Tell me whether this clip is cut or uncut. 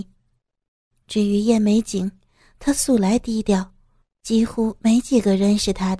uncut